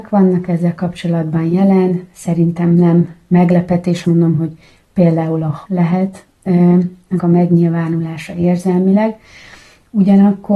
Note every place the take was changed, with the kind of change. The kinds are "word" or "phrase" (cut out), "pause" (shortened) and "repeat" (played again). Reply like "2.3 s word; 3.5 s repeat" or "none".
4.0 s word; 5.6 s word; 7.2 s word